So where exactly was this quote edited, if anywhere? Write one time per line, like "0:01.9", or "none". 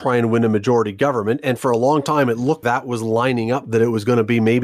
0:02.6